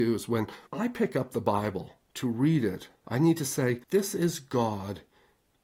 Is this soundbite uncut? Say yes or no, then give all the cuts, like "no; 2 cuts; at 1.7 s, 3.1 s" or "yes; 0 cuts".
no; 2 cuts; at 2.1 s, 3.8 s